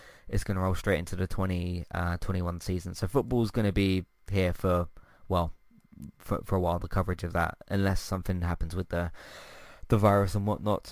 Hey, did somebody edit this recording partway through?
no; 0 cuts

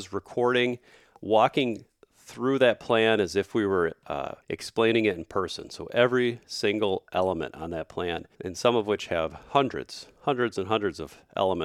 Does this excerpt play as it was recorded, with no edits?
no; 2 cuts; at 4.4 s, 8.3 s

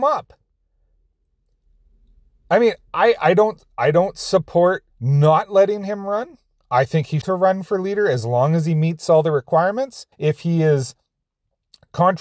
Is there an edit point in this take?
yes; 4 cuts; at 4.9 s, 6.6 s, 7.2 s, 10.1 s

